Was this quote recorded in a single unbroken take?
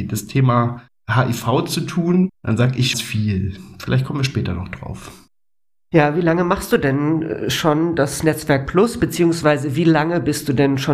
no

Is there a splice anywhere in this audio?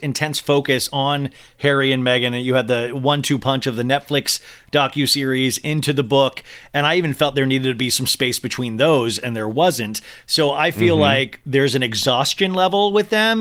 no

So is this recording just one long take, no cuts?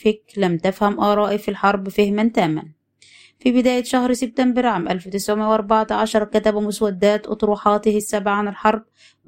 yes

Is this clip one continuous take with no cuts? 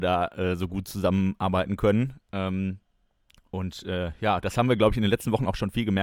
yes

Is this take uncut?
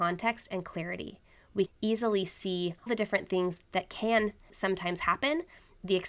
no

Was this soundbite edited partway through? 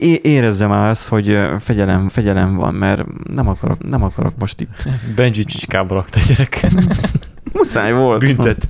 yes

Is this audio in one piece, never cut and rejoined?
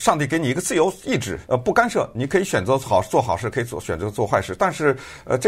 no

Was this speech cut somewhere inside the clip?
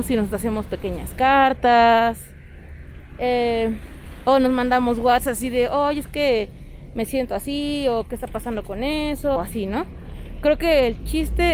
yes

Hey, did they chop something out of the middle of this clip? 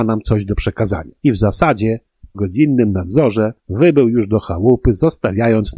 yes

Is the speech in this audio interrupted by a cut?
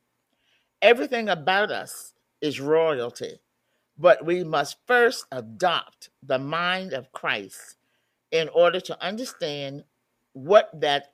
no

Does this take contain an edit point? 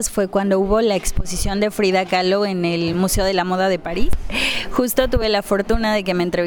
no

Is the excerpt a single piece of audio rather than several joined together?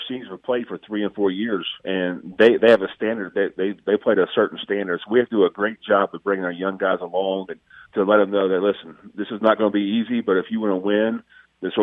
no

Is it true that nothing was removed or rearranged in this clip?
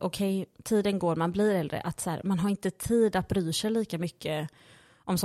yes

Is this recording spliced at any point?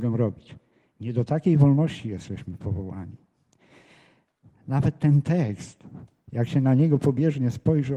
no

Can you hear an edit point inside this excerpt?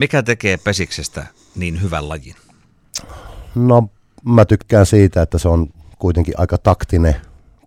no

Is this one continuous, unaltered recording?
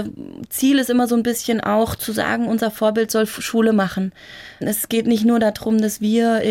yes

